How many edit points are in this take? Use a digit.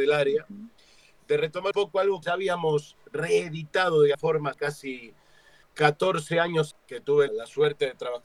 7